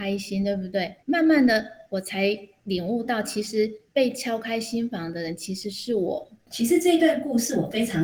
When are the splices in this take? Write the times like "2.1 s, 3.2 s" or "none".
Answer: 1.0 s, 3.9 s